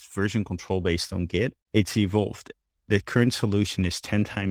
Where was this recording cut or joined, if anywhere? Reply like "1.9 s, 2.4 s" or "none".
1.6 s